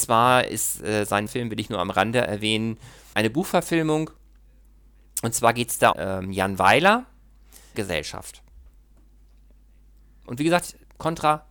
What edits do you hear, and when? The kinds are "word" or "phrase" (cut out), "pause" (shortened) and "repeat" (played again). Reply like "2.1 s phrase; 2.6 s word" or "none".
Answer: 1.3 s word; 3.1 s word; 5.9 s phrase; 7.7 s word